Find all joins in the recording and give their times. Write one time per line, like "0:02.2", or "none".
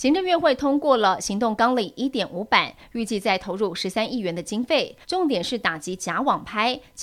0:05.0